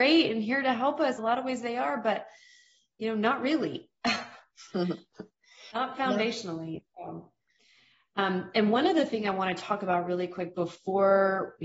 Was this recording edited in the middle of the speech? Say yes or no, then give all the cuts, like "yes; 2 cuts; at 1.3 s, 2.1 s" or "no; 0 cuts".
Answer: yes; 1 cut; at 1.2 s